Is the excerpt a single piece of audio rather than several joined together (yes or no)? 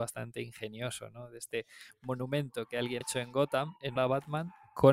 no